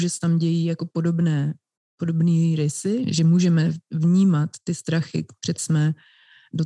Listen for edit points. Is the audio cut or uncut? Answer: cut